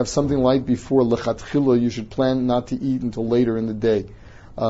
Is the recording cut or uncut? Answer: uncut